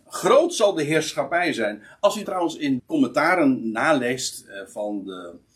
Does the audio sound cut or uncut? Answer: cut